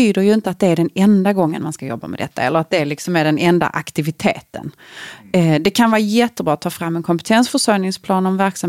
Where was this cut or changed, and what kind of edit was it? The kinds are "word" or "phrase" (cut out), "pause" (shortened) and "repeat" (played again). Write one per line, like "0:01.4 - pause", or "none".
none